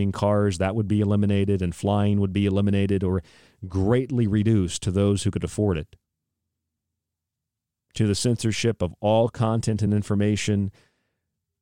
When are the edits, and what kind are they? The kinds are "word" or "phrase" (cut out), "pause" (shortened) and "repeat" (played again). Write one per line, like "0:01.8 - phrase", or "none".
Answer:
none